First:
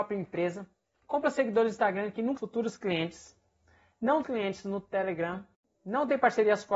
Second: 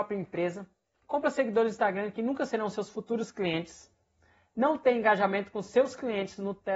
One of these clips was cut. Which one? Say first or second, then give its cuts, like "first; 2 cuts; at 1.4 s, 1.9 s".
first; 2 cuts; at 2.4 s, 4.2 s